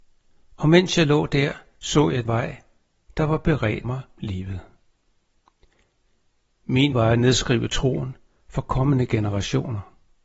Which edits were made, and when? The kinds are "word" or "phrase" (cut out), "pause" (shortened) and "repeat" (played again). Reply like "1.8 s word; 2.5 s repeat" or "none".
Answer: 2.2 s word; 3.8 s word; 4.2 s word; 6.9 s word